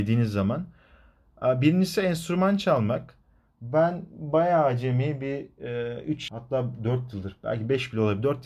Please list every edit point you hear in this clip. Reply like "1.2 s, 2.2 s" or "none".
6.3 s